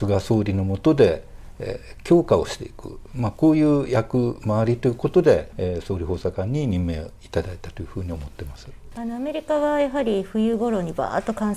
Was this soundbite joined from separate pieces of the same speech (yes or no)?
yes